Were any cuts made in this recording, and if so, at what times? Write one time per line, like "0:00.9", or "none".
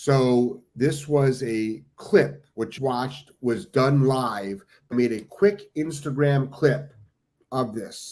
0:02.8
0:04.9

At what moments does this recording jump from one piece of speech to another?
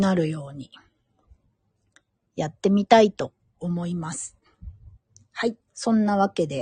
0:05.7

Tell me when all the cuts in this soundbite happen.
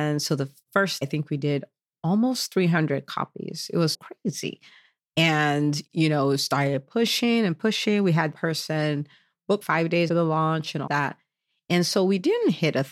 0:01.0
0:03.9
0:08.3
0:09.6
0:10.1
0:10.9

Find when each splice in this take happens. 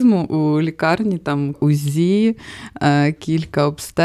0:01.5

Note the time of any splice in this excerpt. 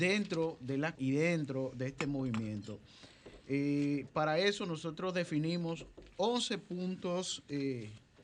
0:01.0

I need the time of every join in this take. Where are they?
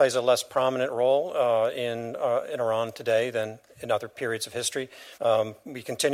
0:05.1

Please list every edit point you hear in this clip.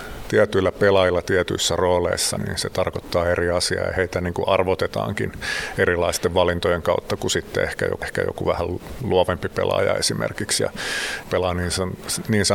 0:02.4
0:08.0
0:11.2

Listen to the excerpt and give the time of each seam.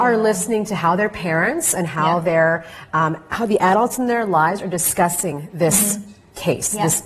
none

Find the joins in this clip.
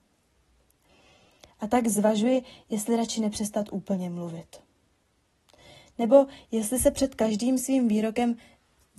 none

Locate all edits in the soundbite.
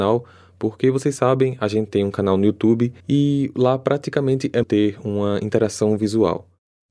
0:01.9
0:03.0
0:04.6

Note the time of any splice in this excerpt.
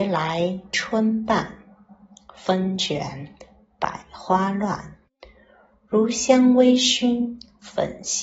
none

